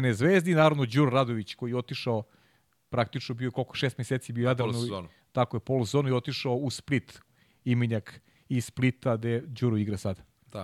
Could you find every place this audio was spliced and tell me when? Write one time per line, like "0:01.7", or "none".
none